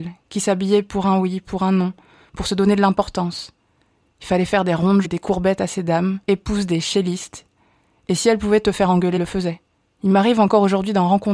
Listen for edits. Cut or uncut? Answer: cut